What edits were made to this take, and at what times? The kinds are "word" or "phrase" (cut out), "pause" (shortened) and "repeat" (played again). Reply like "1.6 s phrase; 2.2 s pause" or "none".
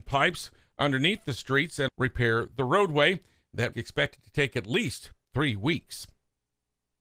1.9 s word; 3.7 s word